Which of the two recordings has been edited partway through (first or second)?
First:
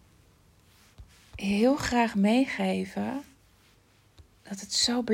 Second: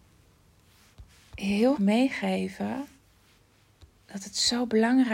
second